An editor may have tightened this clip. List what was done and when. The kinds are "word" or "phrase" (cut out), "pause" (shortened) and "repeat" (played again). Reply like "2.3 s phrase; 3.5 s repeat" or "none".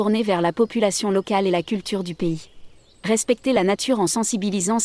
2.7 s pause